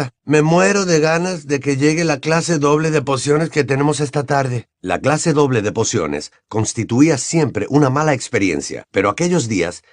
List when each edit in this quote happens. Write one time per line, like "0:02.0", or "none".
0:04.7